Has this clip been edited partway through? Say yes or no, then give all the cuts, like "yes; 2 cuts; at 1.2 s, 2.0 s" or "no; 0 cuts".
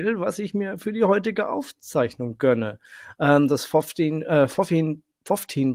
no; 0 cuts